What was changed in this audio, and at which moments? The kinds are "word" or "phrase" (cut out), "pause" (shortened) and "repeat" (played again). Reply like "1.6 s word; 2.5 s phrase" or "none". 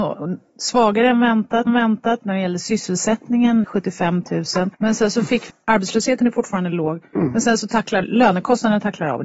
1.7 s repeat; 3.6 s phrase; 4.7 s pause; 5.5 s phrase; 8.0 s phrase